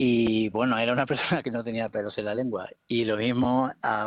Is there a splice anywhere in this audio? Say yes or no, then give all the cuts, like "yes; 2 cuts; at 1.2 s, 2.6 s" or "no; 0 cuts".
no; 0 cuts